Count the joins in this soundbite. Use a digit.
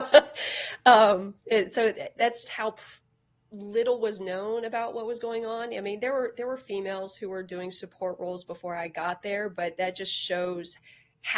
1